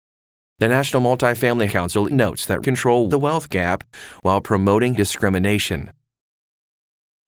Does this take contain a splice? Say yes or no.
yes